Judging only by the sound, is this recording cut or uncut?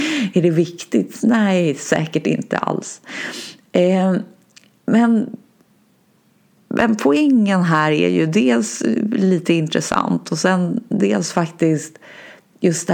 uncut